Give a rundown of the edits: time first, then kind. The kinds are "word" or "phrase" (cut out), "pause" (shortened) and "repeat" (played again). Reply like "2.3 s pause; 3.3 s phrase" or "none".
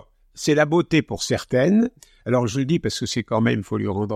none